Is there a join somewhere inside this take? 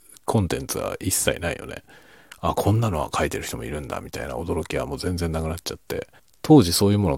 yes; 1 cut; at 6.2 s

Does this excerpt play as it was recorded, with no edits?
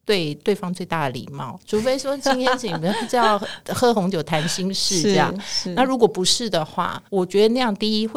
no; 1 cut; at 7.1 s

